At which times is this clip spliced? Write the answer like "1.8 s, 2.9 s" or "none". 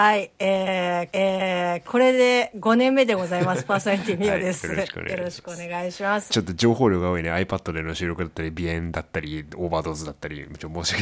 1.1 s, 6.3 s